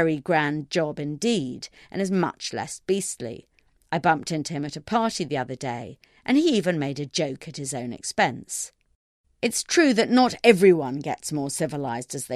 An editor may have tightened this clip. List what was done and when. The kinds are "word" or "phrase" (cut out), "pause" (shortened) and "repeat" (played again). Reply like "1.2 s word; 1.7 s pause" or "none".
none